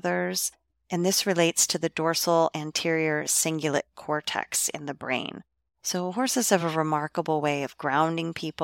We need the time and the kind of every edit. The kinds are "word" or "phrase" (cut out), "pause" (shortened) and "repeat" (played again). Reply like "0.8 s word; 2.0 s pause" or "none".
none